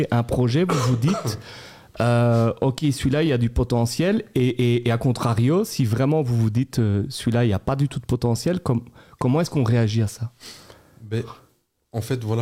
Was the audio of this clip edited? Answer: no; 0 cuts

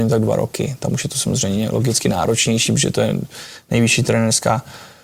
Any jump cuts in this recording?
no; 0 cuts

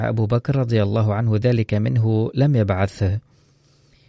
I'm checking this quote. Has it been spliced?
no; 0 cuts

